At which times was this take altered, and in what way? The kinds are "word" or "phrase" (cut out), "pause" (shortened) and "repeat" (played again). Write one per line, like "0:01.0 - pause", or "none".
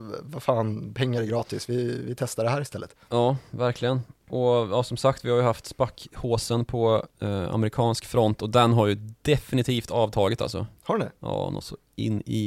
0:07.1 - pause